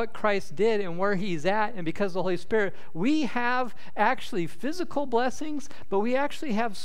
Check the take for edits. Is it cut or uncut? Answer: uncut